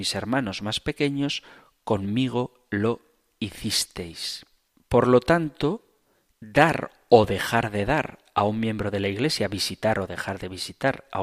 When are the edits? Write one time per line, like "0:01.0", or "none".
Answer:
none